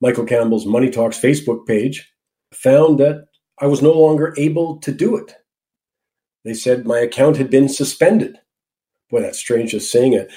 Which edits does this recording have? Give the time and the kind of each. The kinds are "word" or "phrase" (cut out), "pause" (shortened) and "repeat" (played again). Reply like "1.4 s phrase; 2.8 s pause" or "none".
2.5 s word

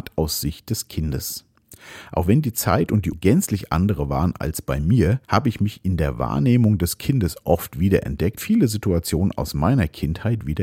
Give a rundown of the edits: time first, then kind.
3.1 s word; 5.2 s pause; 8.4 s phrase

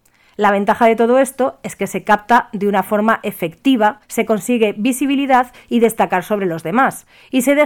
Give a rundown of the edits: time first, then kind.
4.0 s pause

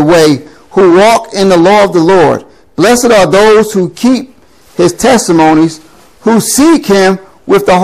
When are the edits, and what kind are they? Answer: none

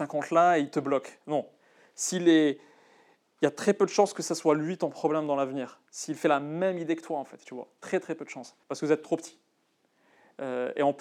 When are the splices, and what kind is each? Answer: 8.6 s pause

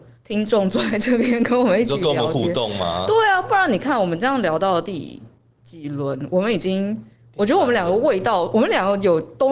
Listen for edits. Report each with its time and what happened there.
none

